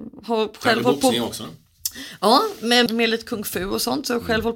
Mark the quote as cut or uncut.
cut